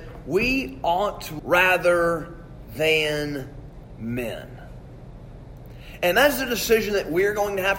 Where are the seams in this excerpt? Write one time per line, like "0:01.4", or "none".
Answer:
0:01.4

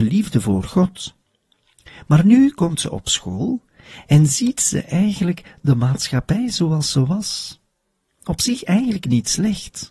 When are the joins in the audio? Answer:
none

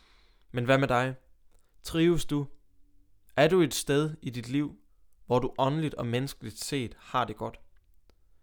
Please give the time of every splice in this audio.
none

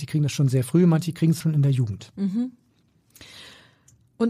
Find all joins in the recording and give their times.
0:01.4

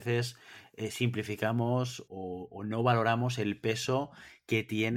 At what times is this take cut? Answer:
0:02.1

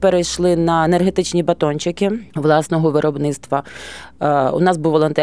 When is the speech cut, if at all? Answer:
0:02.3

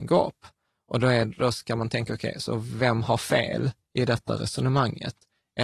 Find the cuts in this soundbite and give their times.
none

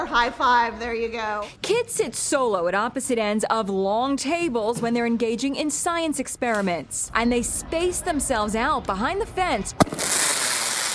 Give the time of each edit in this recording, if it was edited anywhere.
none

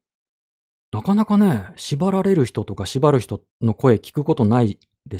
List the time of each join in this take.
0:03.5

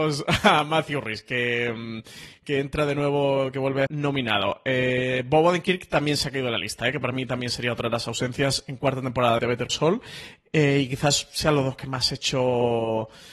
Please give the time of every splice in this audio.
0:02.4
0:03.9
0:09.4
0:09.7

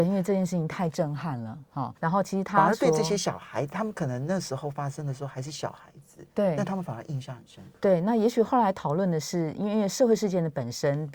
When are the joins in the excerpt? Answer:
0:02.0

